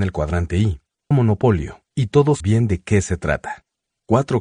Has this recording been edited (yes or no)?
yes